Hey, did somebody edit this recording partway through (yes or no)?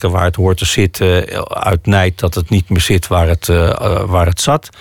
no